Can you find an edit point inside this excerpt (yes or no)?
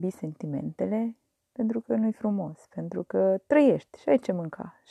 no